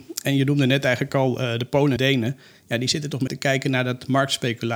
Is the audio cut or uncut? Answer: cut